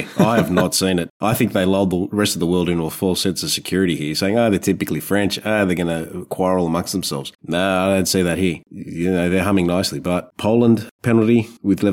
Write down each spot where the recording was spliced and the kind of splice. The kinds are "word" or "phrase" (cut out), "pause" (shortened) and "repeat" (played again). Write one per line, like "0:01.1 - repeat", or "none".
none